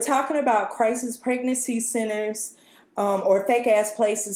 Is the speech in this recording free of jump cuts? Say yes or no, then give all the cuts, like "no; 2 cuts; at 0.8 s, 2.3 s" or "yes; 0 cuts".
yes; 0 cuts